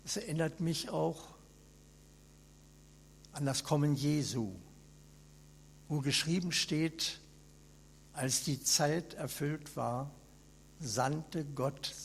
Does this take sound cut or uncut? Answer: uncut